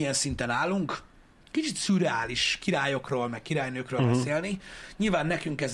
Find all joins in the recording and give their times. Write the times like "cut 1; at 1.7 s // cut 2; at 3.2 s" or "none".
none